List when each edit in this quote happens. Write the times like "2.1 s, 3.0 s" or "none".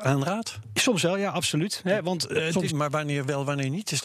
2.7 s